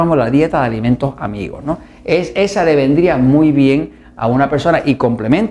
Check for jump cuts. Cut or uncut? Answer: uncut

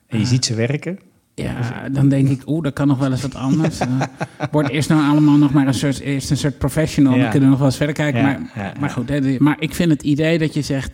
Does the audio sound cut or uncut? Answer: uncut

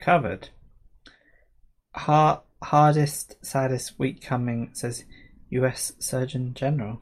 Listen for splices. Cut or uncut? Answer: uncut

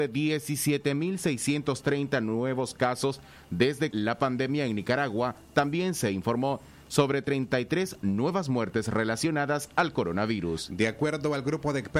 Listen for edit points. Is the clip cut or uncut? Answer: cut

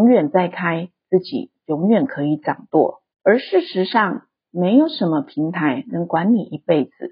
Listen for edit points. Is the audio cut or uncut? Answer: cut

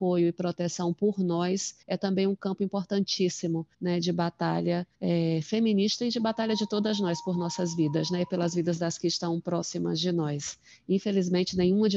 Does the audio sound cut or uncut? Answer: cut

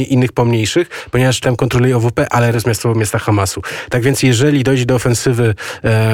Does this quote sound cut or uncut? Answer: cut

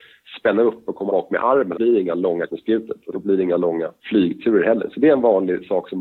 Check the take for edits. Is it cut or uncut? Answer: cut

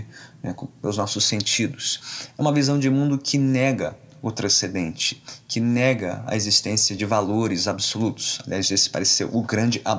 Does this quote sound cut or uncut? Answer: uncut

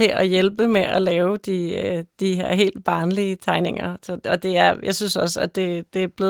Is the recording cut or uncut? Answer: uncut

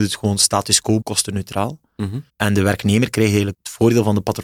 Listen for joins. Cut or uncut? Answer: cut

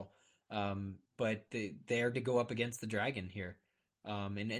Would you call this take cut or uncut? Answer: cut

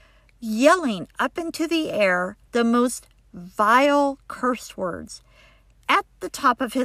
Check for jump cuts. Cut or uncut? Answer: uncut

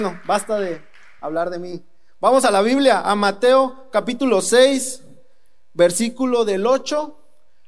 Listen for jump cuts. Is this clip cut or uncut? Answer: uncut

